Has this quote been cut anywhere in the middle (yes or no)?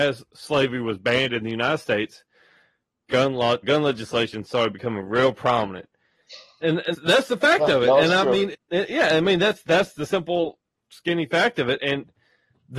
yes